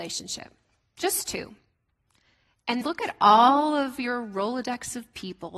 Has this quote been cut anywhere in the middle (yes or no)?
yes